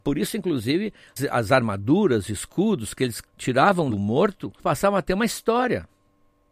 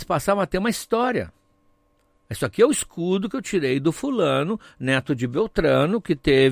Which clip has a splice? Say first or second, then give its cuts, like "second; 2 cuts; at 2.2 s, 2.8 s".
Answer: first; 4 cuts; at 1.2 s, 2.3 s, 3.3 s, 4.6 s